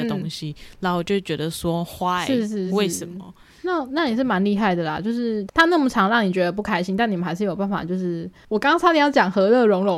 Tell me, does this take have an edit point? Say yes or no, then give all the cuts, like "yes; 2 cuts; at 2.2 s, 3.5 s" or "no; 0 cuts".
no; 0 cuts